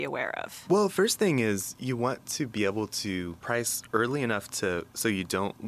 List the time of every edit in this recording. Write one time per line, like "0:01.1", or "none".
none